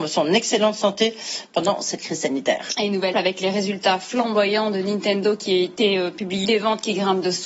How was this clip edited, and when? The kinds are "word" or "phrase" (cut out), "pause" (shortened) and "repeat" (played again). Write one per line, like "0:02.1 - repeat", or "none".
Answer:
0:03.1 - word
0:06.4 - word